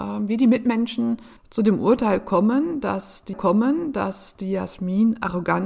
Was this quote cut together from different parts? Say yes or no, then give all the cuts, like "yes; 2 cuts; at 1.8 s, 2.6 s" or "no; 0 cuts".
yes; 2 cuts; at 1.4 s, 3.3 s